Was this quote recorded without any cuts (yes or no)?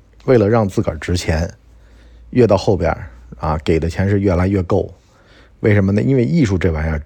yes